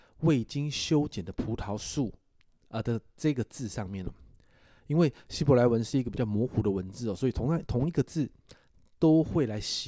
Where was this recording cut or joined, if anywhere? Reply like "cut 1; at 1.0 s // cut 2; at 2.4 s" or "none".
none